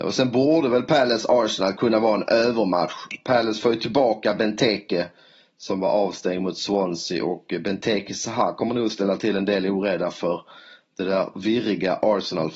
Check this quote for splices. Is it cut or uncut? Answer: uncut